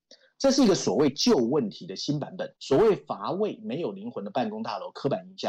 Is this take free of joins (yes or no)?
no